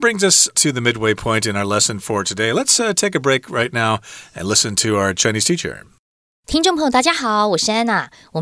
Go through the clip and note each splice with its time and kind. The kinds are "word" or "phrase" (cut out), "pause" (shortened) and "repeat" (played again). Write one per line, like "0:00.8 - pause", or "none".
none